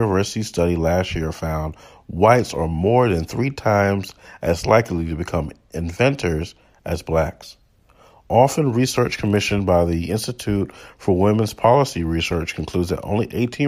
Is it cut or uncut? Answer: uncut